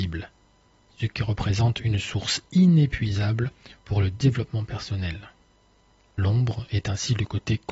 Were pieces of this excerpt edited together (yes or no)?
no